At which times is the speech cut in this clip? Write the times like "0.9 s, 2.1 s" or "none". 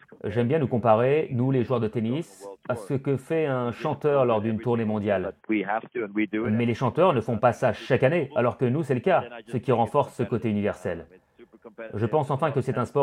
5.4 s